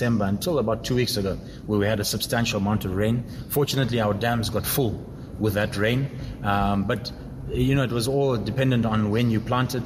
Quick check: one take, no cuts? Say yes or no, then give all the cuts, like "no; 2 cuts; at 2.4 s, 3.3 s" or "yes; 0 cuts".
yes; 0 cuts